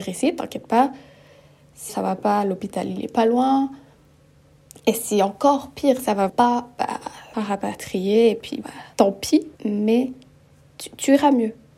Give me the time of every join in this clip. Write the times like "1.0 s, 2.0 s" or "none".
1.9 s, 6.3 s, 7.3 s, 8.6 s, 8.9 s, 9.6 s